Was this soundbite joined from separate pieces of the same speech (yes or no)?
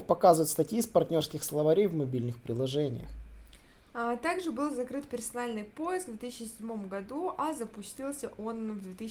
no